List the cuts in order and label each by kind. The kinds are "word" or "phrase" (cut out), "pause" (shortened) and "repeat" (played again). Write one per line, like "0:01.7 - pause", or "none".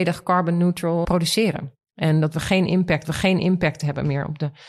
0:01.0 - word
0:03.0 - repeat